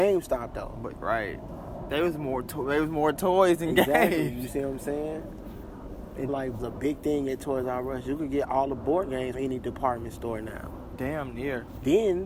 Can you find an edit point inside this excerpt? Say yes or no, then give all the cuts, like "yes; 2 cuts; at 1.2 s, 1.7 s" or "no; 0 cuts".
yes; 4 cuts; at 0.9 s, 6.3 s, 6.6 s, 9.3 s